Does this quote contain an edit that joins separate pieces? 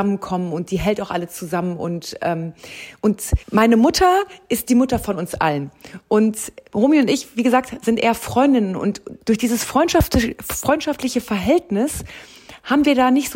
yes; 1 cut; at 3.4 s

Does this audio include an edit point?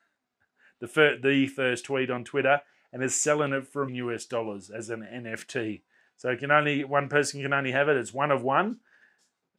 yes; 1 cut; at 3.9 s

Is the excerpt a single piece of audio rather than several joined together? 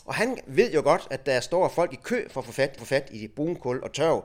no; 1 cut; at 2.8 s

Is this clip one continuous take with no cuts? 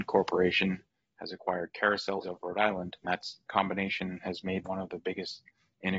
no; 4 cuts; at 2.2 s, 3.0 s, 3.5 s, 4.6 s

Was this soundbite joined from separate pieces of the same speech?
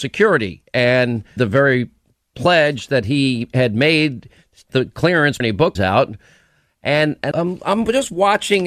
yes; 5 cuts; at 1.4 s, 4.7 s, 5.4 s, 5.8 s, 7.3 s

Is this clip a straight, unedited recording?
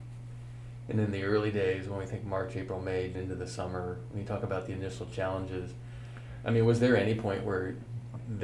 no; 1 cut; at 3.1 s

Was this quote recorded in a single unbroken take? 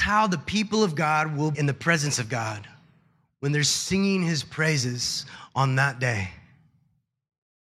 no; 1 cut; at 1.5 s

